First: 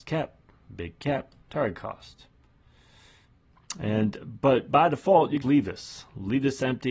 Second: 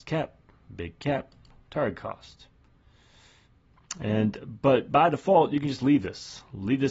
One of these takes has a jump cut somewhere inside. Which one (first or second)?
first